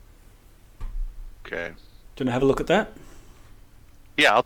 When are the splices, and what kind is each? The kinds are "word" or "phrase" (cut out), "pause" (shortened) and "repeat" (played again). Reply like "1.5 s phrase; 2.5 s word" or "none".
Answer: none